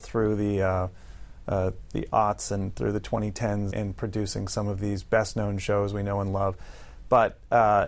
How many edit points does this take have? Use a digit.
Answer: 1